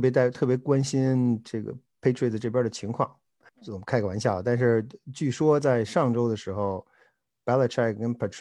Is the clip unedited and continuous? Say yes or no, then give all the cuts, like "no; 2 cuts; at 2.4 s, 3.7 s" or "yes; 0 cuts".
yes; 0 cuts